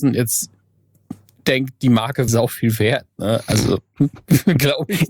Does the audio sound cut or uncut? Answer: cut